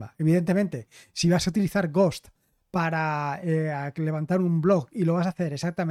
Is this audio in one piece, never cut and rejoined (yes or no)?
yes